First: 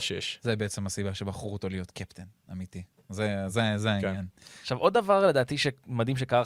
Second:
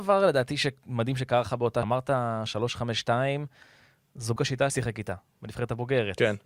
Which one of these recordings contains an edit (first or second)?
second